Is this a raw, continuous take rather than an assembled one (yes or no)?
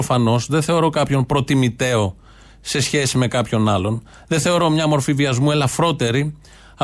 yes